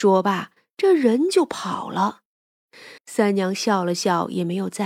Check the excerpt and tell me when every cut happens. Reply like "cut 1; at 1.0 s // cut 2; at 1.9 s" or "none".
cut 1; at 3.0 s